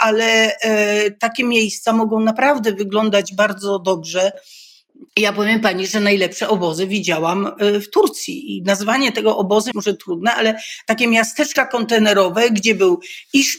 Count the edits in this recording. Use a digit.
2